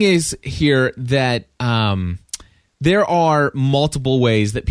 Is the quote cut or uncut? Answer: uncut